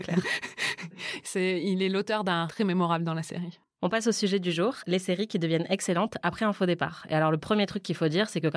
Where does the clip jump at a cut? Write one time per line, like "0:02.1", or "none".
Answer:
0:02.5